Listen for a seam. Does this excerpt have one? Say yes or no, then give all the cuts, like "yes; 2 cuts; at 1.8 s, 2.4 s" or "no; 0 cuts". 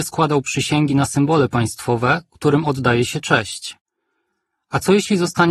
no; 0 cuts